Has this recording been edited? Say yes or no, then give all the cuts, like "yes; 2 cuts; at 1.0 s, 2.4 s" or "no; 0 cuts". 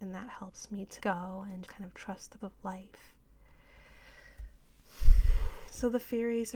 yes; 3 cuts; at 1.0 s, 1.7 s, 2.4 s